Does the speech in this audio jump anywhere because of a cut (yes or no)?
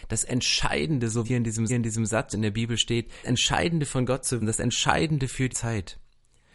yes